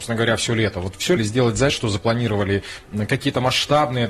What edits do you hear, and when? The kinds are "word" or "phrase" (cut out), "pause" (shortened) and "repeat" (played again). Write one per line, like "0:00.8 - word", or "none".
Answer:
0:01.2 - word
0:01.7 - word